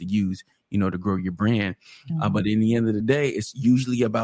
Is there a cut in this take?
no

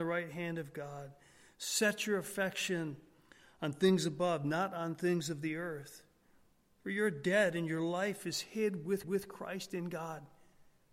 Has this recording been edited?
yes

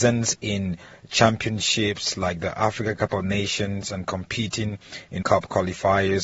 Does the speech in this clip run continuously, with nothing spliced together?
no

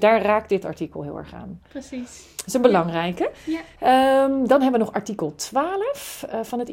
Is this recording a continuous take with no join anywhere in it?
no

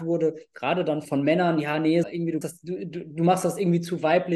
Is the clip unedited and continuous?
no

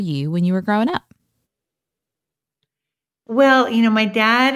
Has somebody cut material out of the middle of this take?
no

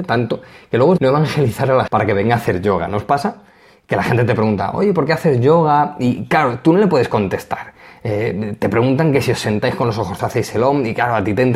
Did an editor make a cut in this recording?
yes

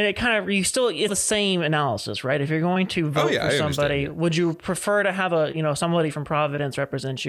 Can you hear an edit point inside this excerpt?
yes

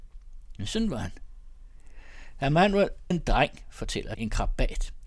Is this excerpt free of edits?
no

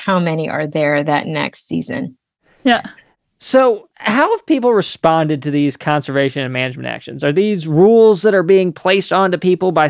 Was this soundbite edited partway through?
no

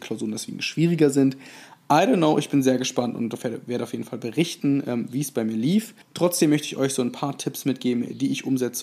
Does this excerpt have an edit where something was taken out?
yes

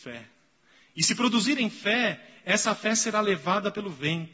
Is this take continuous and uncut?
yes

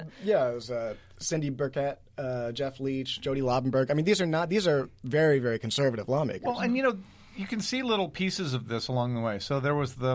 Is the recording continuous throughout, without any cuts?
yes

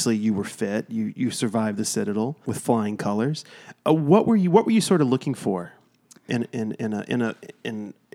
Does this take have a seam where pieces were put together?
yes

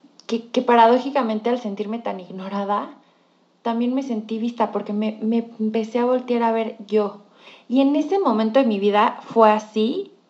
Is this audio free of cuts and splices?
yes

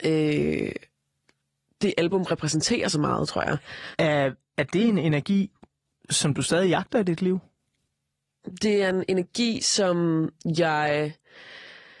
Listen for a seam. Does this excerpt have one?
no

